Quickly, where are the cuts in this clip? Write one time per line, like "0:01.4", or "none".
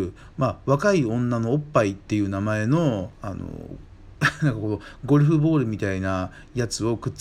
0:03.1

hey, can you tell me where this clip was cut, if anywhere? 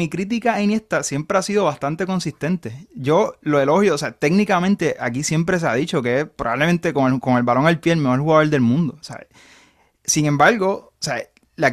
none

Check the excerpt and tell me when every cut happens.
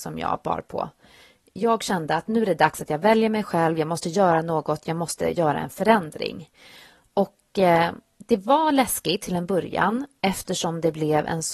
none

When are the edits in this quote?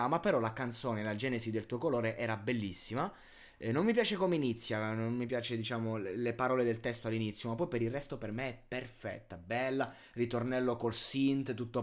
none

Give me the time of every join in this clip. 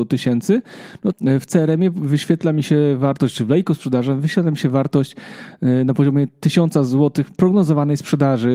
0:01.1

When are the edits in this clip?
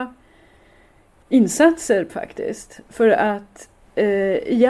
0:02.1

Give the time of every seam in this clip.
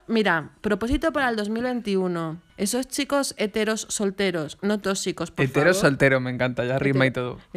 0:02.5

